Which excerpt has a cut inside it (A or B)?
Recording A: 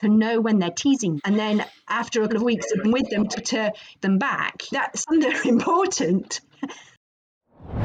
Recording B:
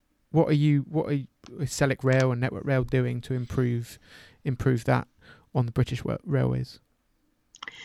A